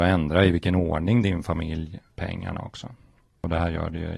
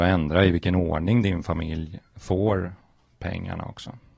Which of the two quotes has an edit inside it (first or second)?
first